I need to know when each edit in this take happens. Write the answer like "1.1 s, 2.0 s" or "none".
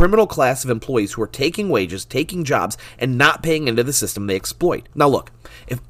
4.9 s